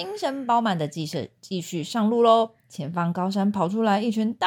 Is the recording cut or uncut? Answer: cut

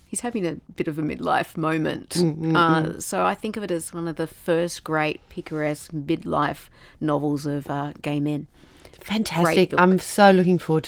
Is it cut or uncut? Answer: uncut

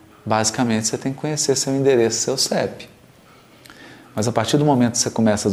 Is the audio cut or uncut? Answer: uncut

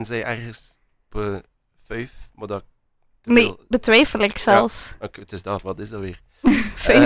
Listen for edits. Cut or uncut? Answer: cut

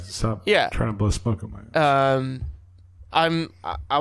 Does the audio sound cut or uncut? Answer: uncut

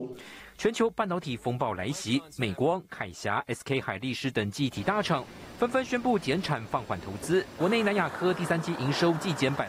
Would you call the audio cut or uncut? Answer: uncut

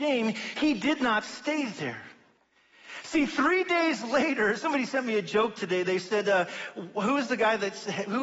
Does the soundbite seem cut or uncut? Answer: uncut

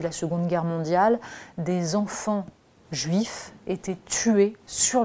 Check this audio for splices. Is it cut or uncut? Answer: cut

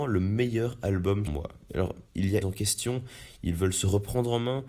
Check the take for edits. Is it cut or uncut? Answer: cut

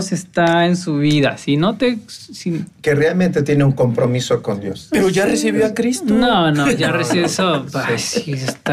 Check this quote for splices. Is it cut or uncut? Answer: cut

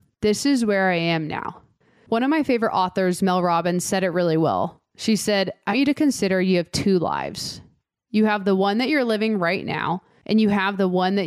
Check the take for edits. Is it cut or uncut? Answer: cut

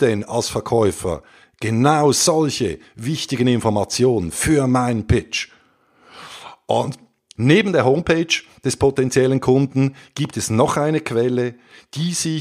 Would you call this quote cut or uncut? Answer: uncut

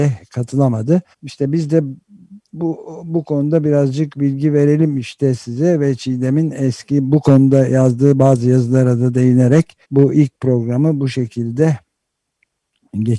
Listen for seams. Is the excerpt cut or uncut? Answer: cut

